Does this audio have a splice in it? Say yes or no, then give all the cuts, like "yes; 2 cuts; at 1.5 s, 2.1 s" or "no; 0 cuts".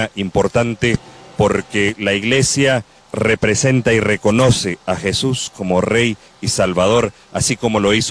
yes; 1 cut; at 3.0 s